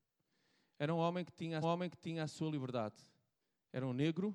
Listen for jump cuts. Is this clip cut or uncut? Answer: cut